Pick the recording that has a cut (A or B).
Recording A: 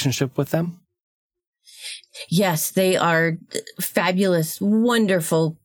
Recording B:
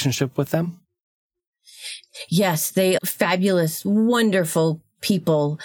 B